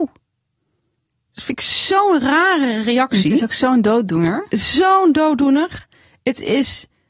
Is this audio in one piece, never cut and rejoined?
yes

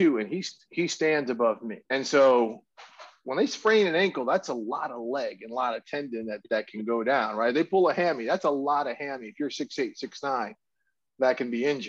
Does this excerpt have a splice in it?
yes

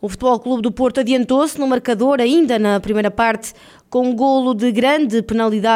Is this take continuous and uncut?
yes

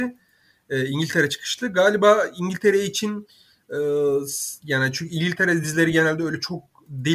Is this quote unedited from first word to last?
yes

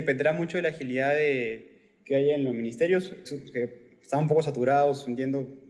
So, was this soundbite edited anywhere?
yes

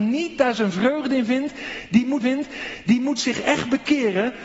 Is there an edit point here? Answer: yes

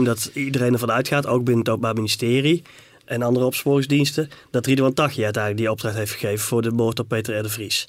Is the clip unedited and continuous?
yes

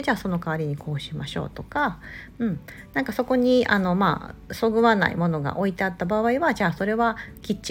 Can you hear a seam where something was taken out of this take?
no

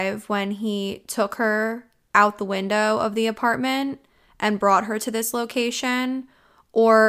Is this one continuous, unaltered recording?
yes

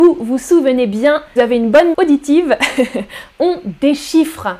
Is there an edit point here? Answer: yes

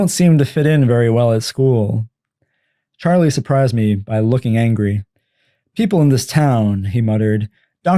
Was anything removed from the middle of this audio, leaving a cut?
no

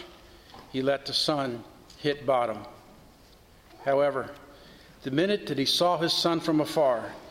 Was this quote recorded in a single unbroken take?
yes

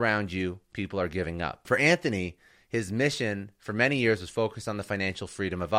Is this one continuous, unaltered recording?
yes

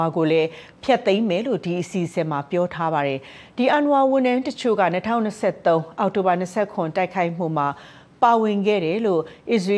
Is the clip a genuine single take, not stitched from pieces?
yes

